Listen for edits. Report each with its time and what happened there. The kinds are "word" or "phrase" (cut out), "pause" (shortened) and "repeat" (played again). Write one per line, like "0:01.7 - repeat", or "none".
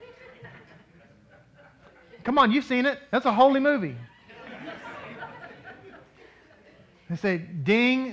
none